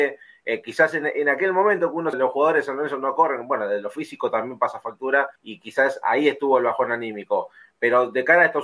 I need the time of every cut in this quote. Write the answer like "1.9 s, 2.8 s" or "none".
2.1 s, 5.4 s